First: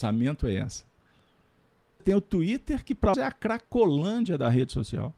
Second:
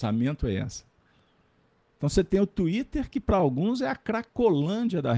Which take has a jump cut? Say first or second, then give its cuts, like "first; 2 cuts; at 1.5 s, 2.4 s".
first; 2 cuts; at 2.0 s, 3.1 s